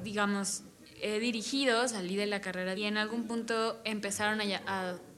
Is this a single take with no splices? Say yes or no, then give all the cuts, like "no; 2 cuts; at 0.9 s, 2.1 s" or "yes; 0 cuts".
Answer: no; 1 cut; at 2.8 s